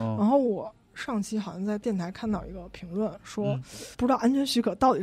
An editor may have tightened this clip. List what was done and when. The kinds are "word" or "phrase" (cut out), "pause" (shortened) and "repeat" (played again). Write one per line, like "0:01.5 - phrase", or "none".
0:03.9 - pause

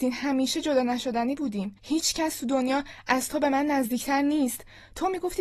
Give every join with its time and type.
0:01.8 - pause

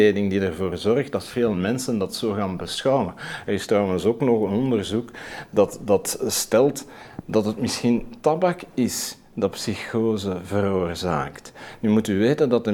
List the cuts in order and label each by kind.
none

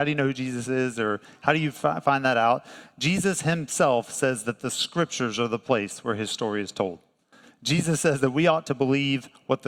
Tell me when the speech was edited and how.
none

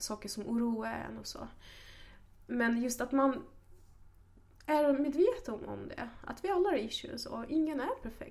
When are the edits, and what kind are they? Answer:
none

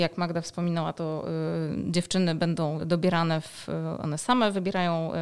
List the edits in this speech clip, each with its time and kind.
0:02.8 - word

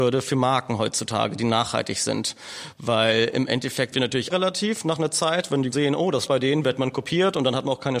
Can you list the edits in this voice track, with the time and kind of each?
0:03.9 - word
0:04.3 - word
0:05.7 - word
0:06.3 - word

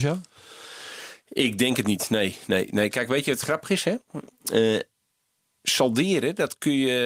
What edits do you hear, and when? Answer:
none

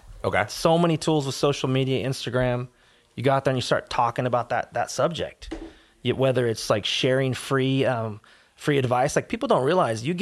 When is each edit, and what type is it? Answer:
none

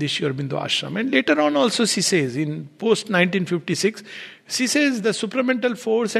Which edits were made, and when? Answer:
none

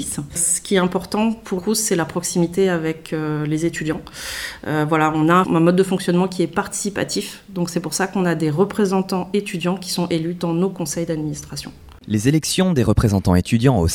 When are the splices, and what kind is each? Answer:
0:01.6 - word

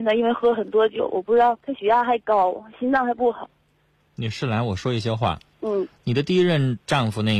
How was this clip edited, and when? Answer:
0:01.6 - pause
0:05.5 - pause

